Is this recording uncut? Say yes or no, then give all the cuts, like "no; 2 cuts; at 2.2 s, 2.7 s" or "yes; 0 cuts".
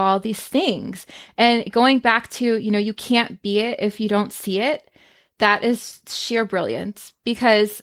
yes; 0 cuts